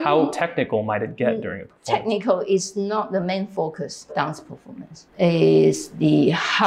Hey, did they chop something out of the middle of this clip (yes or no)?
yes